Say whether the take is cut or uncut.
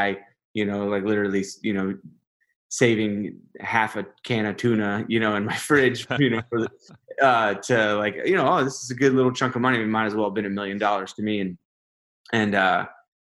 uncut